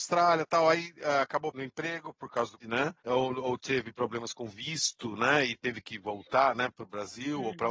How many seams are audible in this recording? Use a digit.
3